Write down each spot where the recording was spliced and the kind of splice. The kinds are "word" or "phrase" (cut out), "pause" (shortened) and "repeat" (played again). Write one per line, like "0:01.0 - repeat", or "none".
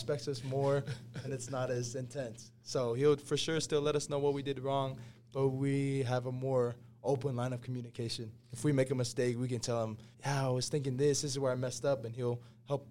0:08.4 - pause
0:10.1 - pause